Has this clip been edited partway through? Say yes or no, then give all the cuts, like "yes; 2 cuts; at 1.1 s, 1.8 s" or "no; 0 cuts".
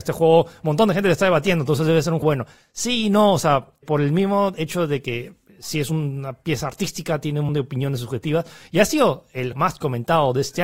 yes; 4 cuts; at 2.2 s, 3.8 s, 7.5 s, 9.5 s